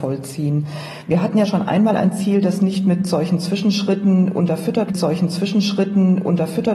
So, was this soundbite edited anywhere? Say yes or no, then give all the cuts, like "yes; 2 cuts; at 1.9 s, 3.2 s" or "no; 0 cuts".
yes; 1 cut; at 4.9 s